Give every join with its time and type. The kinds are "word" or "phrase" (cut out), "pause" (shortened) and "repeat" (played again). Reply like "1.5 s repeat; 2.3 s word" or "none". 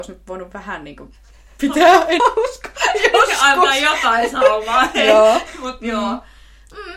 2.2 s word